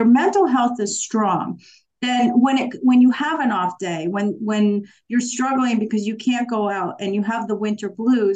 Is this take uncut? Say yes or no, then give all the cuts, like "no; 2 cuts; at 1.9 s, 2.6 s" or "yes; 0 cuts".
yes; 0 cuts